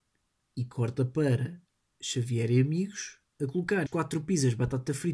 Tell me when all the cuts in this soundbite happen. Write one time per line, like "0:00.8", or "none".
0:03.9